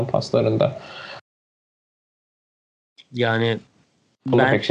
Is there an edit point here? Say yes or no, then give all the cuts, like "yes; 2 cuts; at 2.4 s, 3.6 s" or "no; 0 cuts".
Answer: no; 0 cuts